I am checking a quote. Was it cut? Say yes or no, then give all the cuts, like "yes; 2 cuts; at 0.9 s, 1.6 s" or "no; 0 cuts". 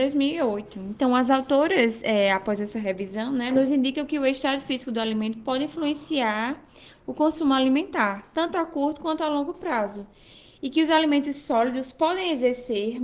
no; 0 cuts